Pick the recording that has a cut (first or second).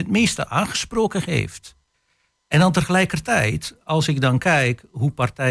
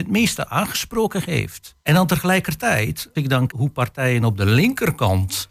second